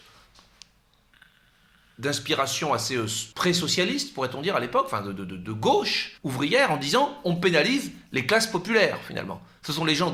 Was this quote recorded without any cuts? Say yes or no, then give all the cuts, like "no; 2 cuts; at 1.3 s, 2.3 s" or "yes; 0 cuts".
no; 2 cuts; at 3.3 s, 6.2 s